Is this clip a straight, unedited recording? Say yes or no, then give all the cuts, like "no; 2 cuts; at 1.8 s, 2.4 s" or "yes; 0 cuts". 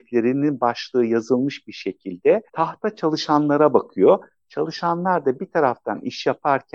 no; 1 cut; at 2.5 s